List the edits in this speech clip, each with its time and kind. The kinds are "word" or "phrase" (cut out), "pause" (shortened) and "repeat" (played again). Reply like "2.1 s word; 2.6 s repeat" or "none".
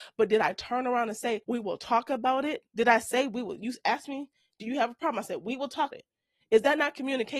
1.4 s pause; 2.7 s pause; 5.9 s word